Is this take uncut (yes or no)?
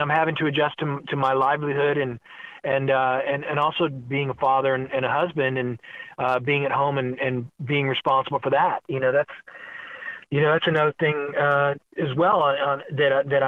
yes